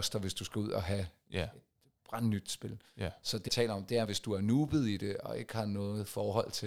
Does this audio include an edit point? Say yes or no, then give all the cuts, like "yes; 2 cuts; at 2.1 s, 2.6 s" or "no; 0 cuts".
yes; 2 cuts; at 3.5 s, 4.1 s